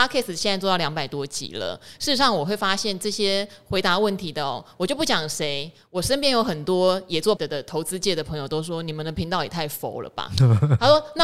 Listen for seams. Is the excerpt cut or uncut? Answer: cut